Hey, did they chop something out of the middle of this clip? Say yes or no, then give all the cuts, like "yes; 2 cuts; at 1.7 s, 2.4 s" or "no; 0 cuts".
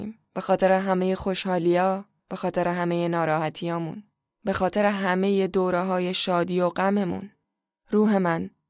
no; 0 cuts